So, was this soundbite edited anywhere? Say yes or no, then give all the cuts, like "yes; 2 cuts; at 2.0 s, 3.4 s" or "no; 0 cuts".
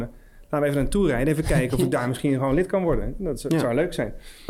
no; 0 cuts